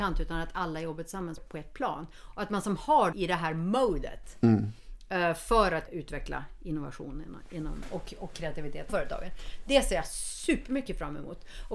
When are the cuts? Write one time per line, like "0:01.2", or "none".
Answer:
0:01.4
0:03.1
0:05.9
0:08.9